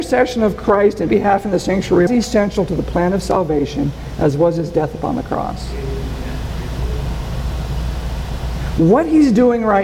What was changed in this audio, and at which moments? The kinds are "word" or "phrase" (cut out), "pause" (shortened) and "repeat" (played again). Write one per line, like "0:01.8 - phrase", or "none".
0:01.1 - word
0:02.1 - phrase